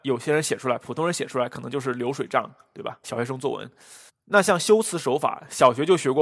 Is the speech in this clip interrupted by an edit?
yes; 1 cut; at 4.1 s

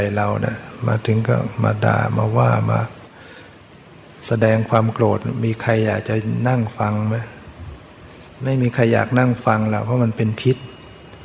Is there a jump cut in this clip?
yes; 1 cut; at 8.3 s

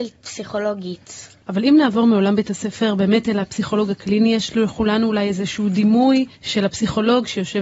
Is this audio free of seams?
no; 2 cuts; at 1.4 s, 6.3 s

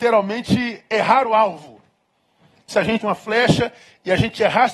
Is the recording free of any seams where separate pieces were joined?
no; 2 cuts; at 2.7 s, 3.0 s

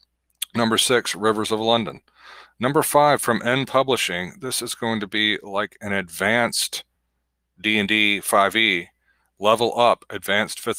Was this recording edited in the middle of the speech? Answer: no; 0 cuts

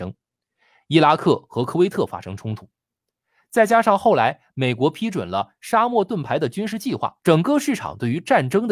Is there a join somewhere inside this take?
yes; 1 cut; at 7.2 s

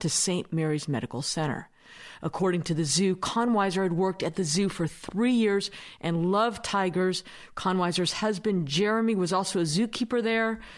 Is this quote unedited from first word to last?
yes; 0 cuts

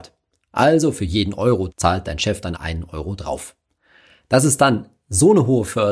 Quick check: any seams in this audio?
yes; 2 cuts; at 1.7 s, 2.5 s

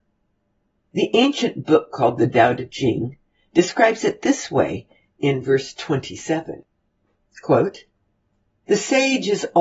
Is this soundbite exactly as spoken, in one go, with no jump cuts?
yes; 0 cuts

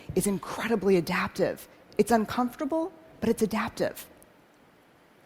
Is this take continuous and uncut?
yes; 0 cuts

